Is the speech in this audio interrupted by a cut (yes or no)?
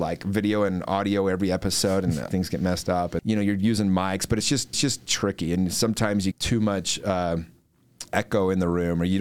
yes